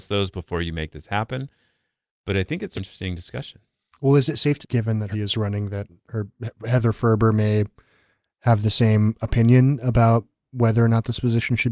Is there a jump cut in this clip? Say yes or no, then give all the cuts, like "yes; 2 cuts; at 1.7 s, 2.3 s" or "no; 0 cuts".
yes; 3 cuts; at 2.8 s, 4.6 s, 5.1 s